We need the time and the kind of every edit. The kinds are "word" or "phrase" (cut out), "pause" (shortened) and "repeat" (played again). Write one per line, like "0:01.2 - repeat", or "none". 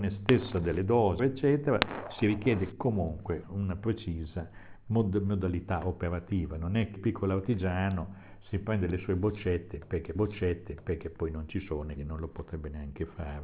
0:01.2 - word
0:03.4 - word
0:07.0 - word
0:10.1 - repeat
0:12.0 - word